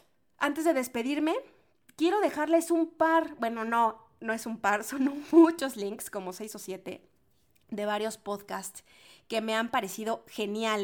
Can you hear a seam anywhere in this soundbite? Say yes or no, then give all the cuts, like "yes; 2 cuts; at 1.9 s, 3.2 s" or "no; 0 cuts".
no; 0 cuts